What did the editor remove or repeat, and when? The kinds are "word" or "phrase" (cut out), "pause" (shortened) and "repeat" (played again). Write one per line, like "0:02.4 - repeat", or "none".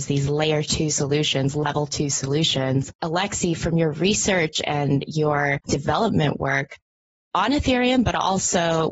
0:02.9 - pause